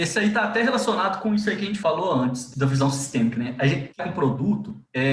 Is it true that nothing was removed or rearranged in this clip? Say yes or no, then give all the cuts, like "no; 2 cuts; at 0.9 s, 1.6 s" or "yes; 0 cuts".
no; 1 cut; at 4.0 s